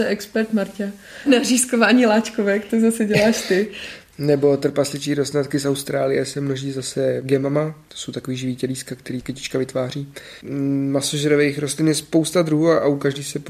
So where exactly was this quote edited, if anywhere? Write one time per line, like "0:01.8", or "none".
0:10.4